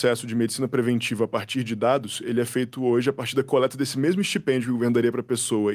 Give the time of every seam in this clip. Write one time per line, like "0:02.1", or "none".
none